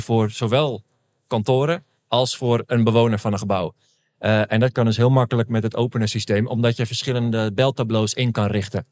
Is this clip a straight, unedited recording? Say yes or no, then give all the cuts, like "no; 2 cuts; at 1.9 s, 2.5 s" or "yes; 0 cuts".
yes; 0 cuts